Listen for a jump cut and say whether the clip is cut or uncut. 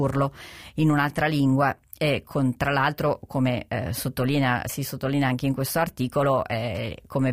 uncut